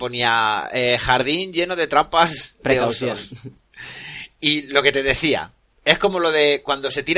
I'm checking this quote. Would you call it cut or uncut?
uncut